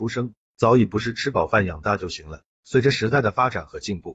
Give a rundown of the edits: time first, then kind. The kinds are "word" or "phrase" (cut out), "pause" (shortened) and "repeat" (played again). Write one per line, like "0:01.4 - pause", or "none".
0:02.5 - pause